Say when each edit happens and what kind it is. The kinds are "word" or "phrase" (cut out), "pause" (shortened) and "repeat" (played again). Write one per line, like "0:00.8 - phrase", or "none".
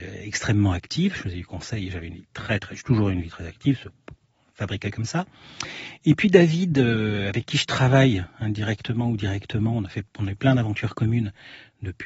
none